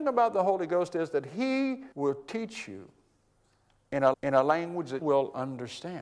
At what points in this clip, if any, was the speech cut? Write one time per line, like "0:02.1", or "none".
0:01.9
0:04.1
0:05.0